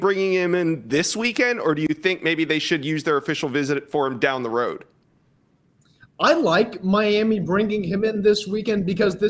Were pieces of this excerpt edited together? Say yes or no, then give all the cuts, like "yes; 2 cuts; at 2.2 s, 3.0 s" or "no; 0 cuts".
no; 0 cuts